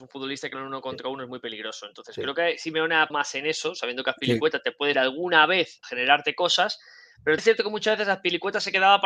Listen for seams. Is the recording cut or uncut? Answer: cut